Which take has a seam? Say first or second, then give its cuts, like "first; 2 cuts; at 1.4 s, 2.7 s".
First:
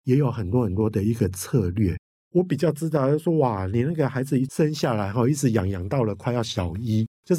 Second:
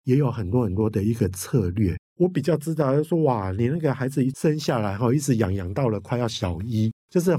second; 1 cut; at 2.1 s